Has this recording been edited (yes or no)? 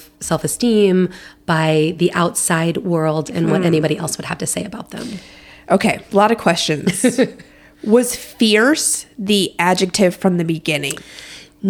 no